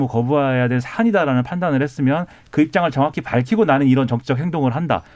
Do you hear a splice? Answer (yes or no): no